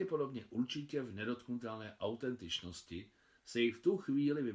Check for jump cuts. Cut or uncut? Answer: uncut